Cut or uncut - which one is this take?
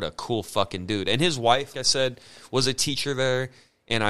cut